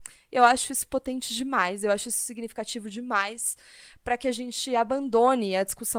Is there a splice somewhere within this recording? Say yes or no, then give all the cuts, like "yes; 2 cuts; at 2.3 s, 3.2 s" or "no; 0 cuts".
no; 0 cuts